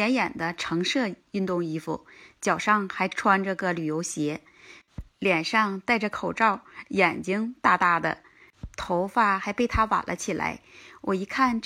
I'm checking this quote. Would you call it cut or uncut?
uncut